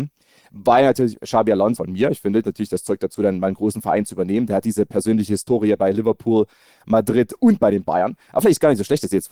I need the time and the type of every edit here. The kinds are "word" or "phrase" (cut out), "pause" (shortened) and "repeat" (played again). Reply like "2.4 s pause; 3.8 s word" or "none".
1.8 s phrase; 2.4 s phrase